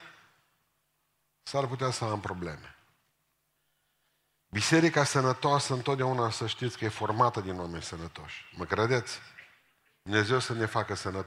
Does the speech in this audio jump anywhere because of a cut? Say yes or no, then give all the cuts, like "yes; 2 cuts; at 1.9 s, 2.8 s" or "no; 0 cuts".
no; 0 cuts